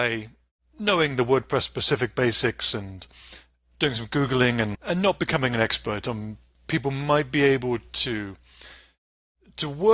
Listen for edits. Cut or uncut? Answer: uncut